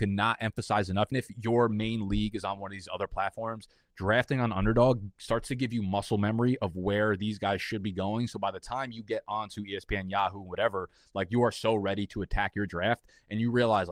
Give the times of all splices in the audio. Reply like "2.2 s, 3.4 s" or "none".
1.1 s